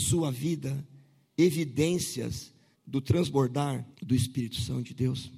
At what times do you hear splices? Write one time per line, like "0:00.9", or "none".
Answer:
0:02.7
0:03.9